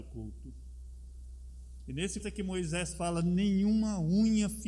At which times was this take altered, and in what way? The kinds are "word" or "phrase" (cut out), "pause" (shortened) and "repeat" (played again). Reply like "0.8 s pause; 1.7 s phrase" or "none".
2.2 s word